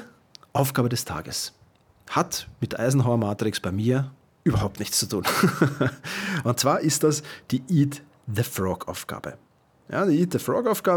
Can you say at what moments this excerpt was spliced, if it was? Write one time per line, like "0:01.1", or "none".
none